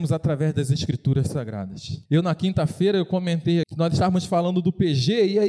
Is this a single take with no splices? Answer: no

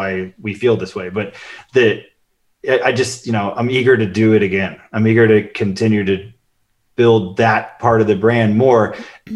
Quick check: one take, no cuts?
yes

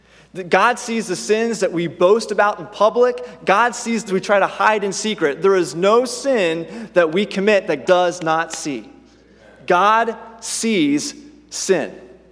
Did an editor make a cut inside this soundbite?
yes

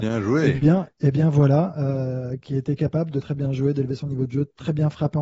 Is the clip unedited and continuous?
no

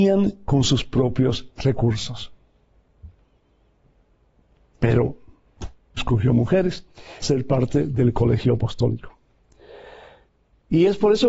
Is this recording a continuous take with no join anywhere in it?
no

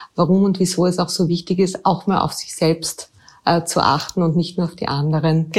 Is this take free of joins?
yes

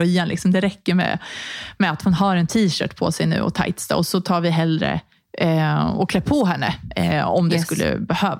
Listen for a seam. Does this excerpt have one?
no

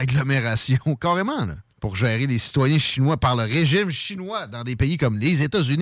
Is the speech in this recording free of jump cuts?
no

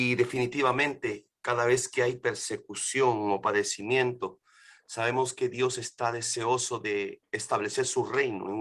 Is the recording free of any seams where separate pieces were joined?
yes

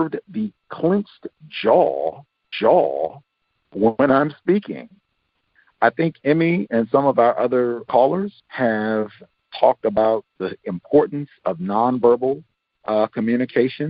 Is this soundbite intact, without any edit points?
no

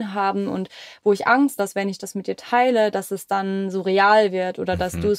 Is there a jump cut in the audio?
yes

